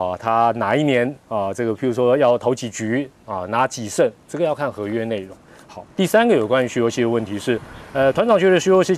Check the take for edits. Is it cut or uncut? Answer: cut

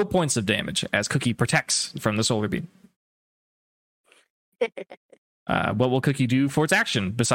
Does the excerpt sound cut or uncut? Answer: uncut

